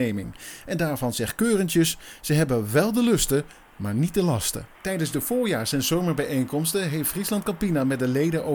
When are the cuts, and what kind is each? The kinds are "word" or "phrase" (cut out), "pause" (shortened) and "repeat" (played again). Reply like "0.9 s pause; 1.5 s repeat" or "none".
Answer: 4.7 s pause